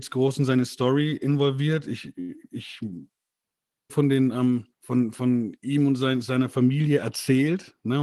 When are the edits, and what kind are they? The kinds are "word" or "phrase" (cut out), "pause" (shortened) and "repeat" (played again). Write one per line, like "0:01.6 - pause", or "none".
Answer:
0:03.9 - phrase
0:04.7 - pause